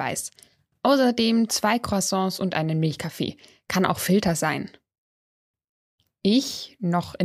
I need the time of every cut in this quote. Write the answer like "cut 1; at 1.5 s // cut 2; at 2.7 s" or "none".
none